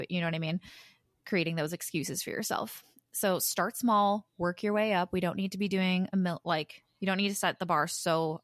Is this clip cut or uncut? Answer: uncut